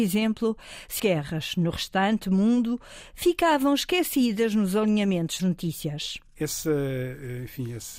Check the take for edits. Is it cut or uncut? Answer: cut